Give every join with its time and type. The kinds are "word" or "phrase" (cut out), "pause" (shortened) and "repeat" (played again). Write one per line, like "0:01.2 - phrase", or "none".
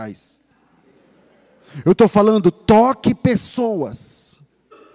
none